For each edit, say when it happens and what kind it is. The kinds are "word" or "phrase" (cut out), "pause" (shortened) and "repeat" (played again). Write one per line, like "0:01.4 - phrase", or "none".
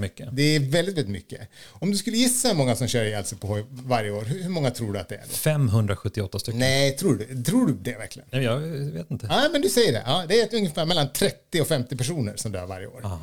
none